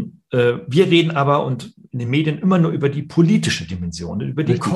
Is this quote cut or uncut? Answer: uncut